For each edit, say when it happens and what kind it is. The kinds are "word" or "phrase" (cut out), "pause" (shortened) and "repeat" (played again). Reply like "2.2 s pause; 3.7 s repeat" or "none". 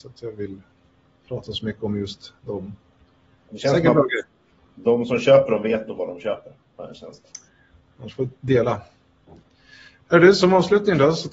none